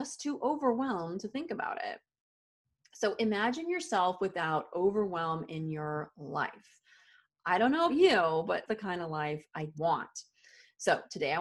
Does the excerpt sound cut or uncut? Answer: cut